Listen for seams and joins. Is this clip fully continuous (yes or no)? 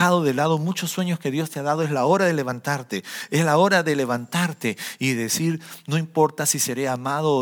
yes